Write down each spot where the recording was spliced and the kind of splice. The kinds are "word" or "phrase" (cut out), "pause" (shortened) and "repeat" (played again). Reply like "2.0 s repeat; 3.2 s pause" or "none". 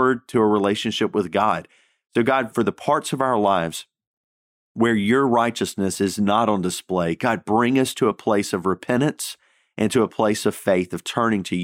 none